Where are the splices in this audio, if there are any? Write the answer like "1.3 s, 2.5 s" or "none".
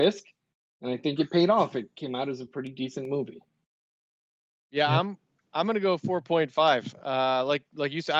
none